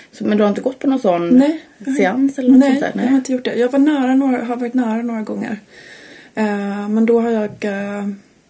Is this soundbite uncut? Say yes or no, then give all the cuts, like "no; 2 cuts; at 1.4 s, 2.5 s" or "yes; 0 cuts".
yes; 0 cuts